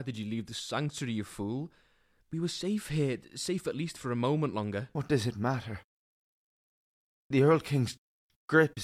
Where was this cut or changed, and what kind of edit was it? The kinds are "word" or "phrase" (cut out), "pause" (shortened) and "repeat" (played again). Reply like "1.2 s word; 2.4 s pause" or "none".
none